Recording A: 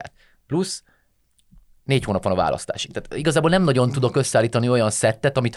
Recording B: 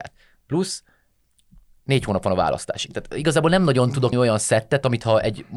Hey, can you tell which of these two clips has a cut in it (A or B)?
B